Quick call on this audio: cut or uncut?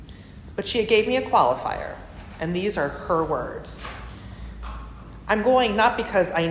uncut